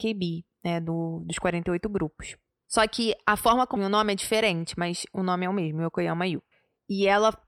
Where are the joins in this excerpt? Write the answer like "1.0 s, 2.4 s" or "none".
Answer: 3.8 s